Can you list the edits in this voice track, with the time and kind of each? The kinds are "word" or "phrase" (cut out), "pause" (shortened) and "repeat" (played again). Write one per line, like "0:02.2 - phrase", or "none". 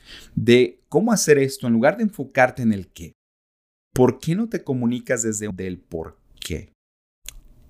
none